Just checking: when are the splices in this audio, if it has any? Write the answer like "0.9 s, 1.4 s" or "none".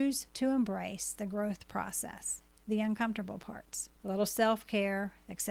2.6 s, 3.9 s